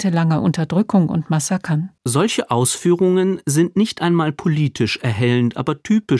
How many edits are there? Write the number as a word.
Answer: one